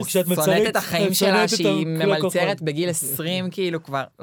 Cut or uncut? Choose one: uncut